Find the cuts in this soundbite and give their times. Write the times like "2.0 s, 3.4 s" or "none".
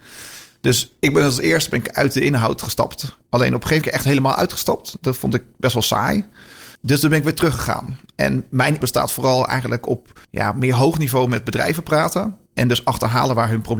3.8 s, 6.7 s, 8.8 s, 10.2 s